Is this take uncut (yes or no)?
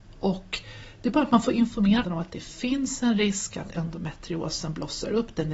no